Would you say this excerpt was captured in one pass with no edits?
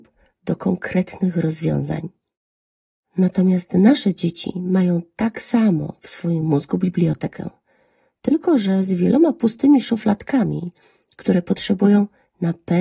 yes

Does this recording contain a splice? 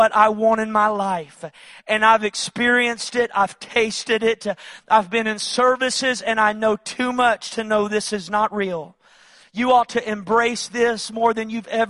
no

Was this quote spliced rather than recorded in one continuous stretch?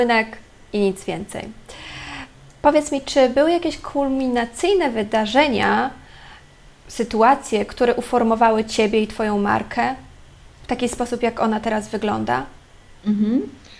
no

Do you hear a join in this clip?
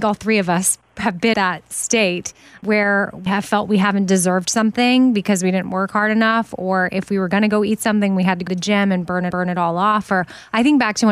yes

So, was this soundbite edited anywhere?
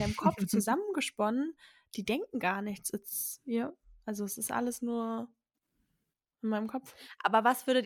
no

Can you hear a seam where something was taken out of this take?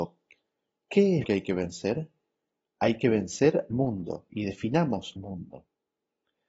yes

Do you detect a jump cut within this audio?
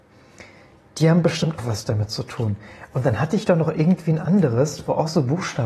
yes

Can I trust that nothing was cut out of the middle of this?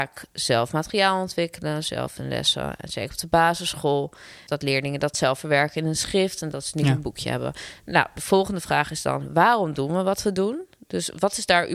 yes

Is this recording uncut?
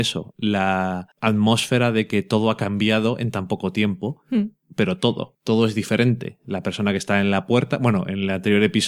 no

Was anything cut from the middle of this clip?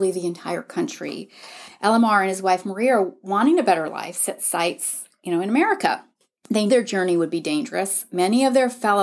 yes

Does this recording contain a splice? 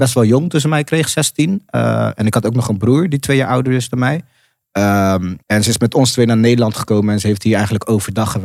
yes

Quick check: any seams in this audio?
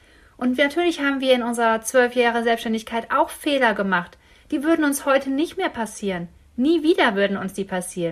no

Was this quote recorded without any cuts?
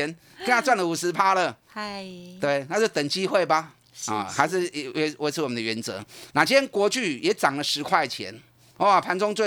no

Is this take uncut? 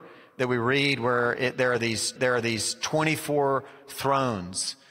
no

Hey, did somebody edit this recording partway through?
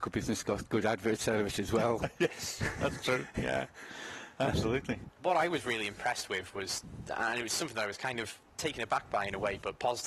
yes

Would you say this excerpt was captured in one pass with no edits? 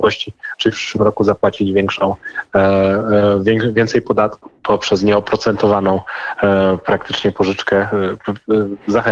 no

